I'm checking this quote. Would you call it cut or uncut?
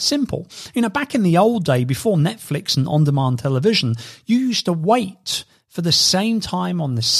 uncut